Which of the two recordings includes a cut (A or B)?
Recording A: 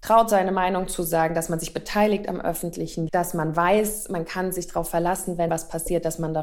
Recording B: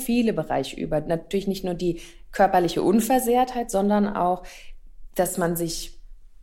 A